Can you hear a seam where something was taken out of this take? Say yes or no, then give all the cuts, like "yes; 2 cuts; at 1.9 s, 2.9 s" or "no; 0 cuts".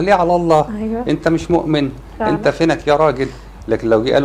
no; 0 cuts